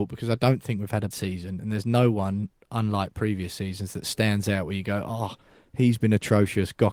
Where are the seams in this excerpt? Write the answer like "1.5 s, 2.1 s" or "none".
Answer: 1.1 s